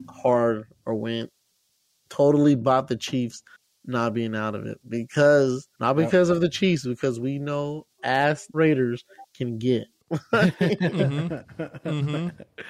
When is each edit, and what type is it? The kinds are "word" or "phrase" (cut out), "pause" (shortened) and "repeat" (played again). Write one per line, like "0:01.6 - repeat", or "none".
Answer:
0:05.7 - pause
0:08.0 - word
0:08.5 - phrase

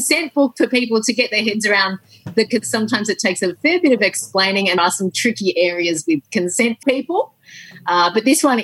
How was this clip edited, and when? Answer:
0:02.5 - word
0:04.8 - word
0:06.8 - word

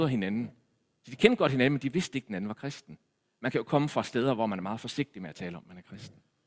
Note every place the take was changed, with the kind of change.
none

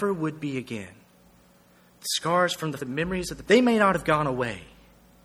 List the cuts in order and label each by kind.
0:02.8 - word
0:03.4 - word

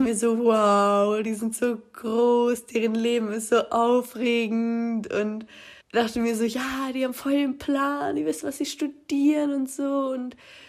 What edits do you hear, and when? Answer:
0:05.8 - pause

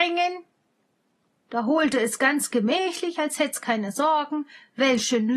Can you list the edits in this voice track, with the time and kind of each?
none

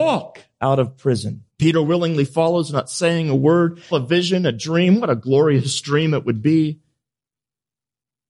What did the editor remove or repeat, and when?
0:01.5 - pause
0:03.9 - phrase

